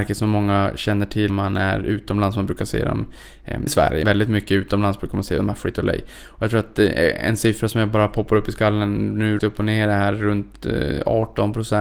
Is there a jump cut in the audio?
yes; 4 cuts; at 1.3 s, 3.7 s, 4.0 s, 9.4 s

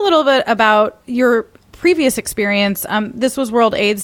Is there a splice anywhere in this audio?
no; 0 cuts

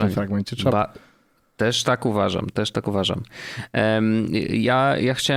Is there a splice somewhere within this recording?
no; 0 cuts

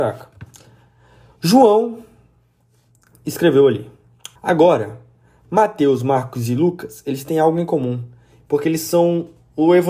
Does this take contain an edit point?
yes; 1 cut; at 4.4 s

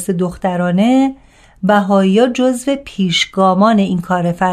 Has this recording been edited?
no; 0 cuts

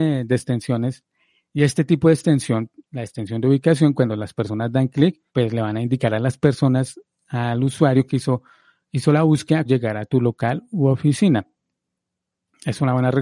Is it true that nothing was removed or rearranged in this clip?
no; 2 cuts; at 5.3 s, 9.6 s

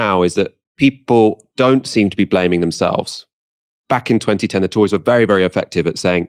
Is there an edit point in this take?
no; 0 cuts

